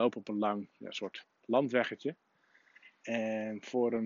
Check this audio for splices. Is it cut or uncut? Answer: uncut